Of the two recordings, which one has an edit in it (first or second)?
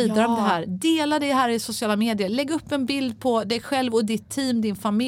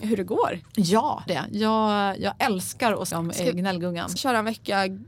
second